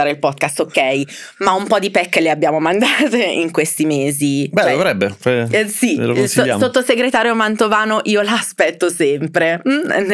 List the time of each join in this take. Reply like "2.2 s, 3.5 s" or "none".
none